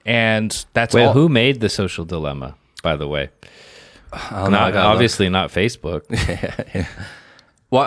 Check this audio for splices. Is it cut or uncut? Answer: uncut